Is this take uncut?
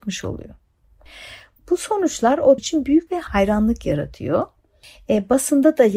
no; 2 cuts; at 2.6 s, 3.1 s

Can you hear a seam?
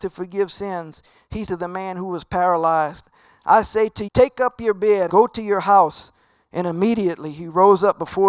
yes; 3 cuts; at 1.5 s, 4.1 s, 5.1 s

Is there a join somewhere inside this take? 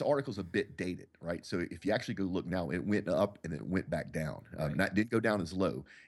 no; 0 cuts

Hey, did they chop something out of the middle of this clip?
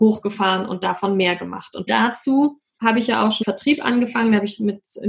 yes; 3 cuts; at 1.9 s, 2.7 s, 3.4 s

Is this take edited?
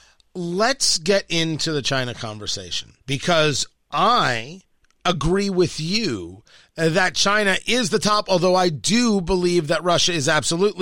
yes; 1 cut; at 3.0 s

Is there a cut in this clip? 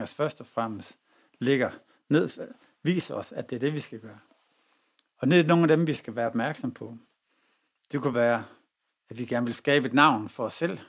no; 0 cuts

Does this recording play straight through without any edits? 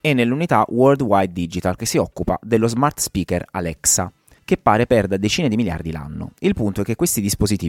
no; 1 cut; at 1.8 s

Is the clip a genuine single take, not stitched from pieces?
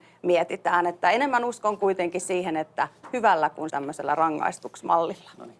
no; 1 cut; at 3.7 s

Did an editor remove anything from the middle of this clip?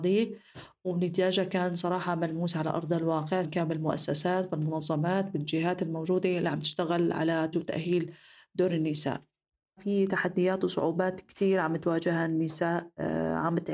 yes; 2 cuts; at 3.4 s, 7.5 s

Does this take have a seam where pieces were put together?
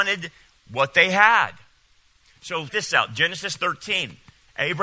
yes; 1 cut; at 2.7 s

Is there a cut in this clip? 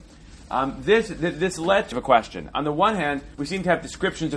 yes; 2 cuts; at 1.9 s, 3.3 s

